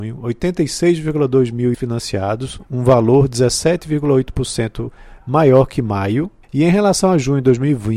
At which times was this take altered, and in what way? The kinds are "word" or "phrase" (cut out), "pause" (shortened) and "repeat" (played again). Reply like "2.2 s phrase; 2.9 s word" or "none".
1.7 s word; 2.7 s pause; 6.4 s pause